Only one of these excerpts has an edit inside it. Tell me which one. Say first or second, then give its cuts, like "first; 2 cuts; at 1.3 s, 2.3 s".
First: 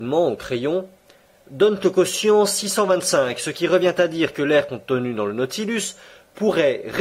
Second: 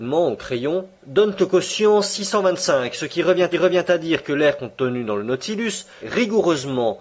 second; 3 cuts; at 1.0 s, 3.5 s, 6.0 s